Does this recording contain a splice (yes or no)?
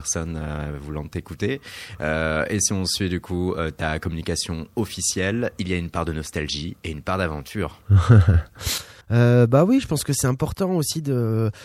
yes